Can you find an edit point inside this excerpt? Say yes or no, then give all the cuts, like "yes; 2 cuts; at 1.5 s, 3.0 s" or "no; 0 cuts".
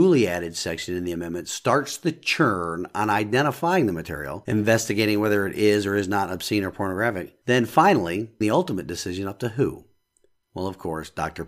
yes; 2 cuts; at 7.4 s, 8.4 s